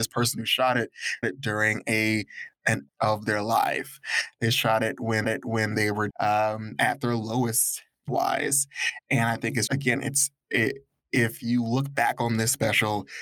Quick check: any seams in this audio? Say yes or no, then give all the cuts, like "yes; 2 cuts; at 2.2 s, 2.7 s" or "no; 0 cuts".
yes; 6 cuts; at 1.2 s, 2.9 s, 5.2 s, 6.1 s, 8.1 s, 9.7 s